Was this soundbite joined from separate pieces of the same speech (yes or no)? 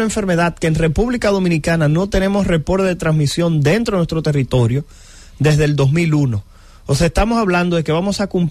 no